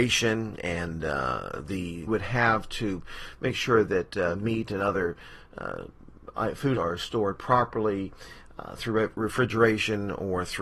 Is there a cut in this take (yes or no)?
yes